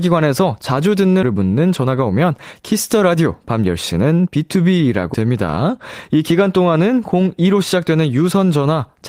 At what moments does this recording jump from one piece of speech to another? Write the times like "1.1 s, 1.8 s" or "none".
1.2 s, 5.1 s